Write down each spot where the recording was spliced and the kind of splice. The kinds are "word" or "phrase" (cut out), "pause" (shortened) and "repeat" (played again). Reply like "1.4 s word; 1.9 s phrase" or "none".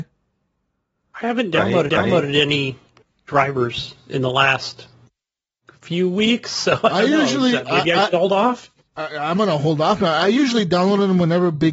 1.9 s repeat